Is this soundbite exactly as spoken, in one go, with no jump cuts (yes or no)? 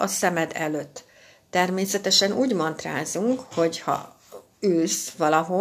yes